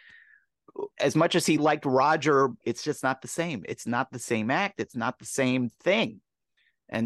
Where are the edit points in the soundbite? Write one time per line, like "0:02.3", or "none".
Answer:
0:00.9
0:01.6
0:02.6